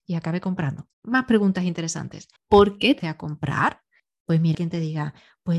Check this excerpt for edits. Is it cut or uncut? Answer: cut